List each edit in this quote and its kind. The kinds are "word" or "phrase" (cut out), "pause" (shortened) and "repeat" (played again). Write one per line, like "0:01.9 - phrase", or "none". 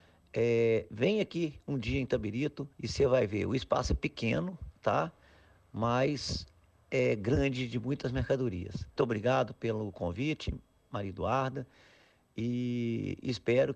0:02.7 - pause
0:09.0 - phrase